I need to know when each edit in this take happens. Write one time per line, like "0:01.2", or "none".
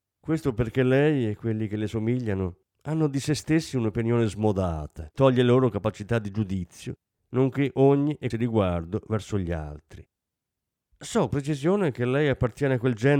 0:05.1
0:08.3
0:11.3